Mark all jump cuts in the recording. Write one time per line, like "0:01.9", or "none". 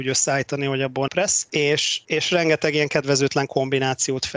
0:01.1